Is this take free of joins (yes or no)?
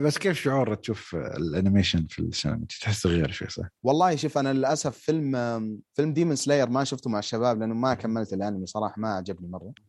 no